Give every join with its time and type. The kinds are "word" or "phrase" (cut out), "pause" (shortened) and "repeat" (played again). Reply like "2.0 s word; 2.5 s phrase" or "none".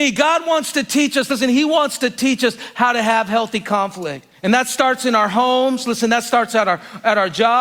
4.3 s pause